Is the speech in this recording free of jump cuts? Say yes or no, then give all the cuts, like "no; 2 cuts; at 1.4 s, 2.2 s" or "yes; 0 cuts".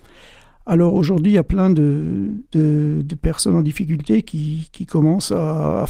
no; 1 cut; at 2.5 s